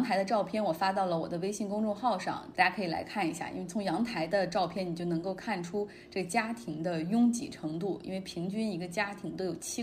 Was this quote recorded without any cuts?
no; 1 cut; at 2.5 s

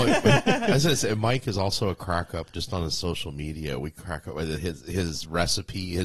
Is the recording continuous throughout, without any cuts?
yes; 0 cuts

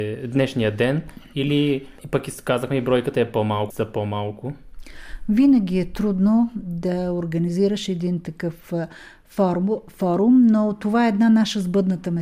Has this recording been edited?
yes; 1 cut; at 3.7 s

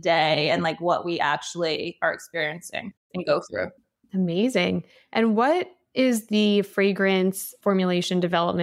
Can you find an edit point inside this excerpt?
no; 0 cuts

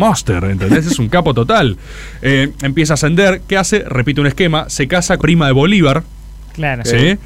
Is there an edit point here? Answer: yes; 1 cut; at 5.2 s

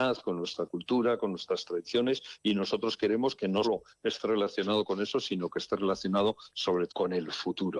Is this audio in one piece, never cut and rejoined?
no; 2 cuts; at 3.6 s, 6.9 s

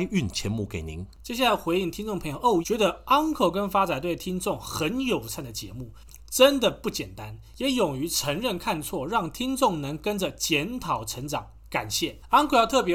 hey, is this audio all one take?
no; 2 cuts; at 2.6 s, 6.2 s

